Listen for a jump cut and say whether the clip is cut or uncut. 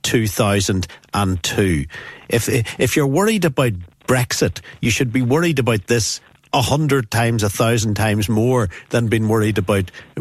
uncut